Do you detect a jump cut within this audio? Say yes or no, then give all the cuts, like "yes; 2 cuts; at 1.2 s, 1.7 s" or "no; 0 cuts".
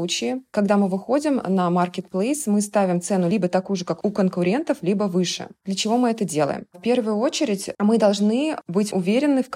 no; 0 cuts